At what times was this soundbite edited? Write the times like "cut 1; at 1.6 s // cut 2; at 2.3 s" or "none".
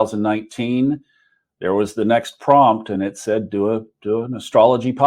none